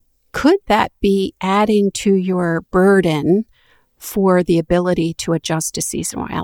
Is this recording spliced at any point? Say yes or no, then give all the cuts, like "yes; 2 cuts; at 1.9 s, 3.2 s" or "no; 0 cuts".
no; 0 cuts